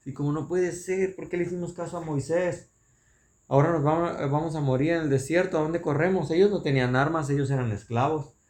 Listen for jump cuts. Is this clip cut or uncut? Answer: uncut